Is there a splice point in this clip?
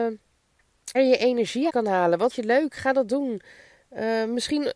yes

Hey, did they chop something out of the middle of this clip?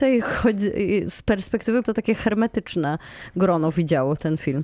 yes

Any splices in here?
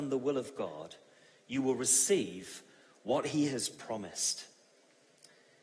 no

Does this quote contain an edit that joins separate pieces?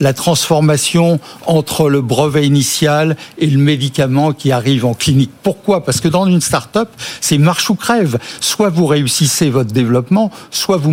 no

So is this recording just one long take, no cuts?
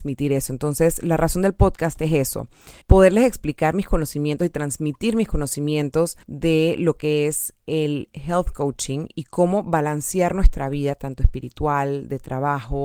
no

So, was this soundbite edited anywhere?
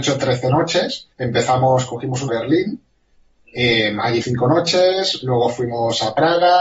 yes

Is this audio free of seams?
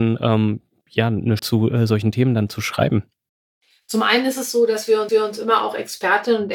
no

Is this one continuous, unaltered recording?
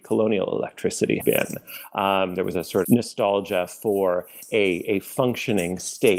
no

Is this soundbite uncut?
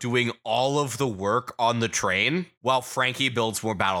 no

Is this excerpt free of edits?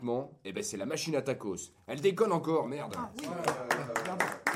yes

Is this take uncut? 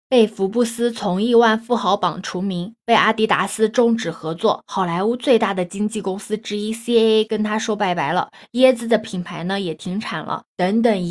yes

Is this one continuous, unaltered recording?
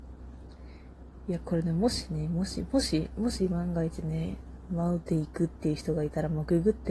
yes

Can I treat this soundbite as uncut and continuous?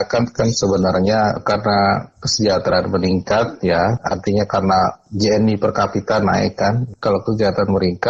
yes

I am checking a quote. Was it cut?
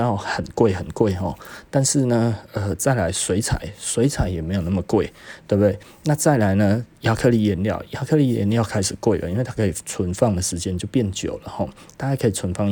no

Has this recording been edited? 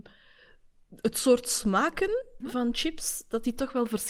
yes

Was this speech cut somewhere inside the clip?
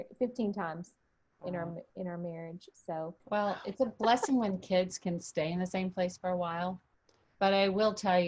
yes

